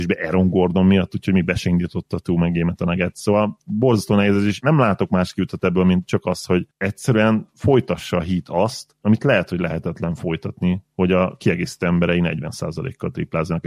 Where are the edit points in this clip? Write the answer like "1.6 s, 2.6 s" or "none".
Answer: none